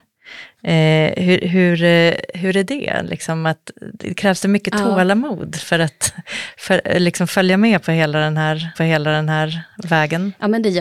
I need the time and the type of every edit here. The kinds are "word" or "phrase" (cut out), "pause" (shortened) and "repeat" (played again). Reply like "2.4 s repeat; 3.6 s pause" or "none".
8.7 s repeat